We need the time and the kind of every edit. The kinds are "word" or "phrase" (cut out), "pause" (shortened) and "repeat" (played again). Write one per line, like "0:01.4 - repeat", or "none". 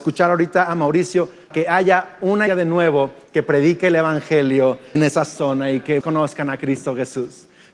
0:01.5 - word
0:02.5 - word
0:05.0 - word
0:06.0 - word